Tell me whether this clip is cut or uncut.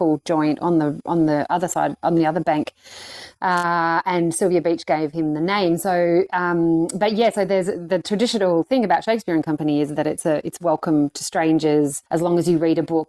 cut